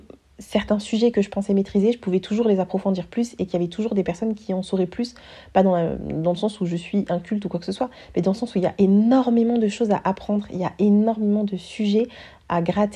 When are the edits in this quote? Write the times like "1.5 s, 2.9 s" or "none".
none